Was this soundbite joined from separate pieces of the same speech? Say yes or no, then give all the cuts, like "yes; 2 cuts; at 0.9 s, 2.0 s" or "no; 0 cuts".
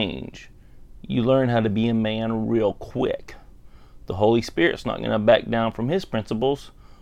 no; 0 cuts